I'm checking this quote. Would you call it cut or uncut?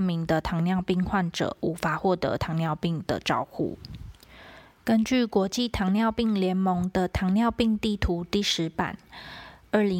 uncut